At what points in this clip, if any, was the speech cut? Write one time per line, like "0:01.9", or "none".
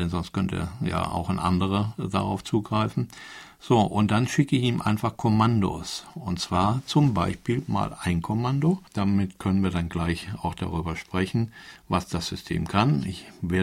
0:08.9